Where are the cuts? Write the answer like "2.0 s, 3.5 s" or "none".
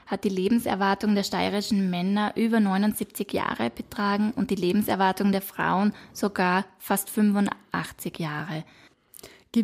none